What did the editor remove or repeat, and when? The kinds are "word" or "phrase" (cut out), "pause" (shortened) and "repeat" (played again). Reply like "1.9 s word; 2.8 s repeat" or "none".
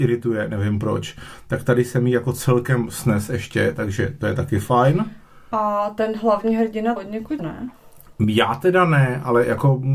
7.0 s word; 7.4 s word